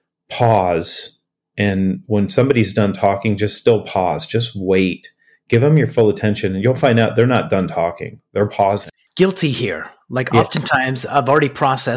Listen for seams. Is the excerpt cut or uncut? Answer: uncut